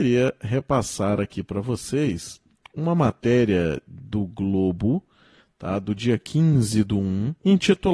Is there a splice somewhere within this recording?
no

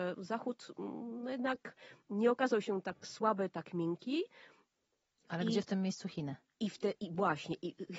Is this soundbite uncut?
yes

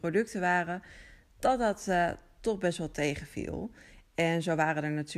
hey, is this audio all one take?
yes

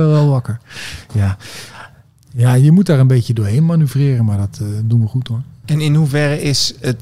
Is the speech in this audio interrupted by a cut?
no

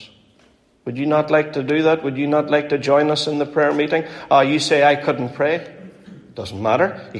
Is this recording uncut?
yes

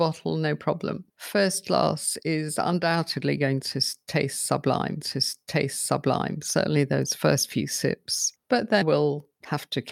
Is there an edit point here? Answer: yes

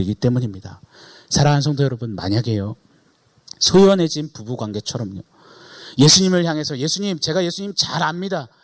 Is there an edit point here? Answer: no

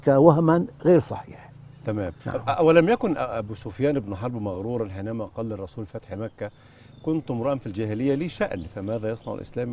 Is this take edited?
yes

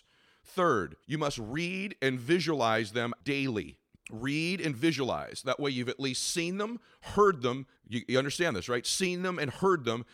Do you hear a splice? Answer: yes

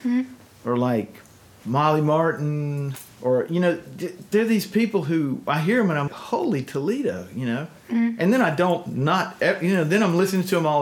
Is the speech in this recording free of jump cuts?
no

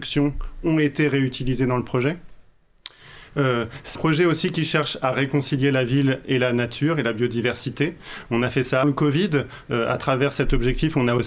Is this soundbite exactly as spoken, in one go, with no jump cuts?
no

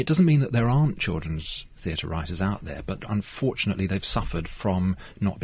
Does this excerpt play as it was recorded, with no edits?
yes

